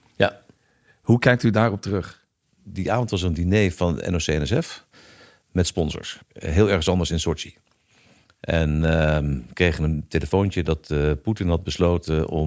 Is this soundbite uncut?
no; 1 cut; at 6.2 s

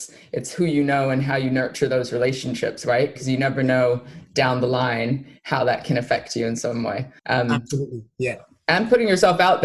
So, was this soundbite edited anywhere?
yes; 1 cut; at 7.2 s

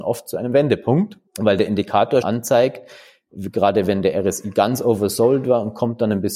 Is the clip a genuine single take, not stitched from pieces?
no; 2 cuts; at 1.3 s, 2.2 s

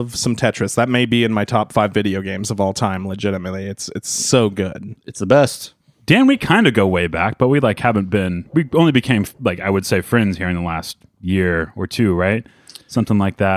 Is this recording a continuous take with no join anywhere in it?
yes; 0 cuts

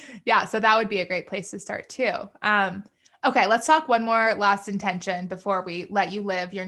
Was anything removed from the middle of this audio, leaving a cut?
no; 0 cuts

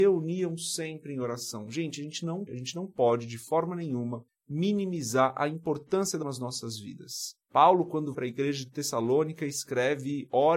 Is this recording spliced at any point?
yes; 5 cuts; at 2.5 s, 4.3 s, 6.2 s, 7.4 s, 8.1 s

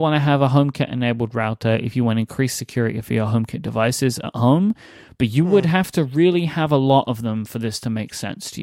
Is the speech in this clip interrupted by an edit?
no; 0 cuts

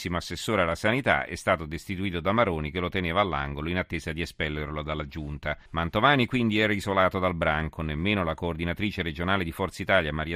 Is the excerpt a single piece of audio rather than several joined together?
no; 1 cut; at 5.7 s

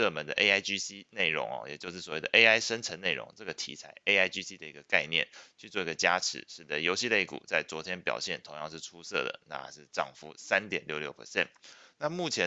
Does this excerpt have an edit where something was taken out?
no; 0 cuts

